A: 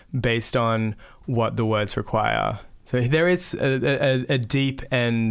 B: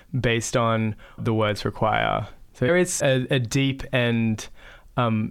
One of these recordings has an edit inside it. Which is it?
B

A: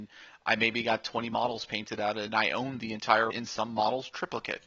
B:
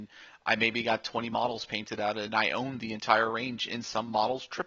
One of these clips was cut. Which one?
A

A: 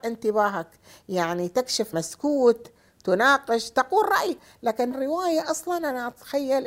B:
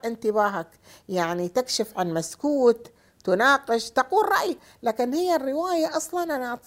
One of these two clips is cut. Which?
A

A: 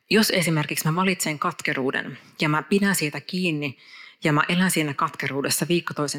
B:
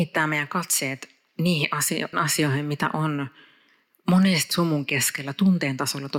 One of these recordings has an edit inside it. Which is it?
B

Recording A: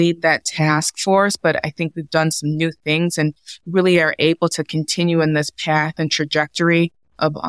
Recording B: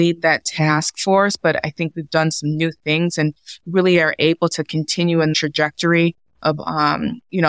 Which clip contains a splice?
B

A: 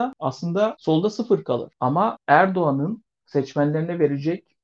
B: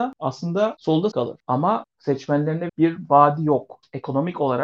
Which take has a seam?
B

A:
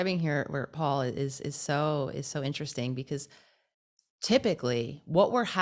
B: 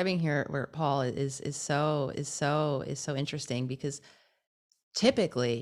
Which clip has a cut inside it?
B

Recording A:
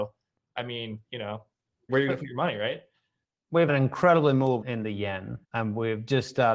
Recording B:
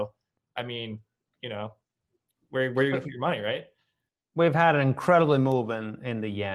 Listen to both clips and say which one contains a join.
A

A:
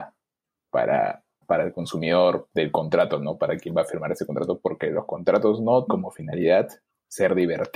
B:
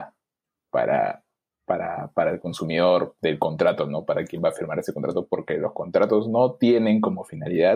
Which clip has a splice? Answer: A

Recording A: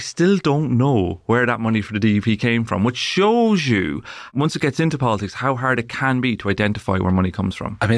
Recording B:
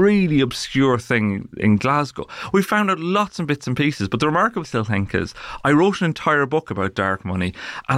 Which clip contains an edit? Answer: B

